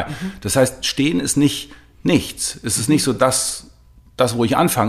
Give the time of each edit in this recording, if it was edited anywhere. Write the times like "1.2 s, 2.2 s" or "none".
none